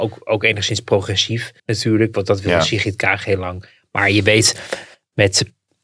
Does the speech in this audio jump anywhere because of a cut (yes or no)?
yes